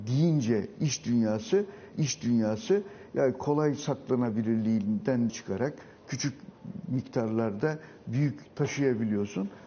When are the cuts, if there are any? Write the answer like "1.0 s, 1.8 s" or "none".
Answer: 1.9 s, 5.3 s, 8.5 s